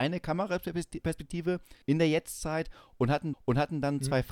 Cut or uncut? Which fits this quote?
cut